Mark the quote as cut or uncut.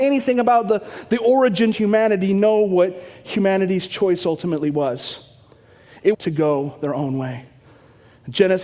cut